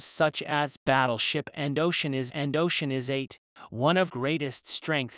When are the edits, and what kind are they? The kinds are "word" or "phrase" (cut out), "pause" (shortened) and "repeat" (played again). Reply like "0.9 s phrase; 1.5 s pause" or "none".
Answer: 2.3 s repeat; 4.1 s word